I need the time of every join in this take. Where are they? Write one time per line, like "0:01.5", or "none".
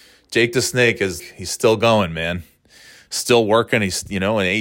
0:01.2